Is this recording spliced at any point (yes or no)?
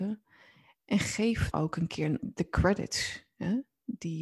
yes